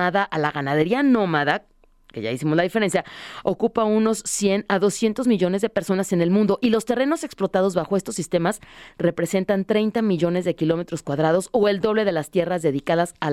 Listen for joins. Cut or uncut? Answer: uncut